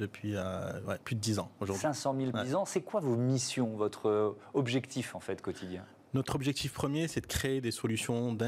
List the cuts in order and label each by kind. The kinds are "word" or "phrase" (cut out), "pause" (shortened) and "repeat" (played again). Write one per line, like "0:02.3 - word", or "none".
0:02.3 - word